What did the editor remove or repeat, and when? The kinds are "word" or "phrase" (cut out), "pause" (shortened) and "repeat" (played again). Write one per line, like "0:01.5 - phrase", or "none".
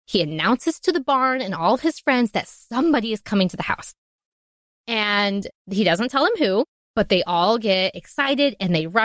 none